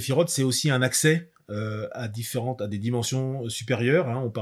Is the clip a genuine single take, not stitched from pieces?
yes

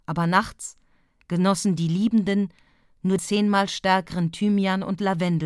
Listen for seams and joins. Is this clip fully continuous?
no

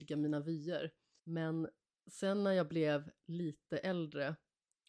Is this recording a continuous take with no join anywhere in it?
yes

